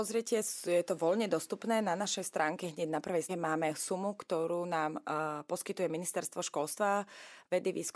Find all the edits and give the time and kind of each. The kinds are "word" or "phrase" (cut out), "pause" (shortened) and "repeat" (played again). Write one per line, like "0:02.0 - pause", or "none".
0:03.3 - word